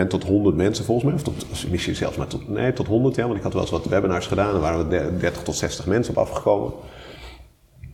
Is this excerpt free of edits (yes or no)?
yes